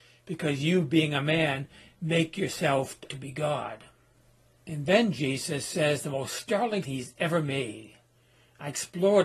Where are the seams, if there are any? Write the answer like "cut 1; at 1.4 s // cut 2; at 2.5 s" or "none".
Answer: cut 1; at 3.1 s // cut 2; at 6.8 s